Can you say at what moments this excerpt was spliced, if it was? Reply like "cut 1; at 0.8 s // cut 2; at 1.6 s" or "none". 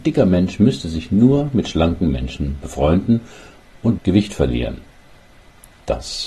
cut 1; at 4.0 s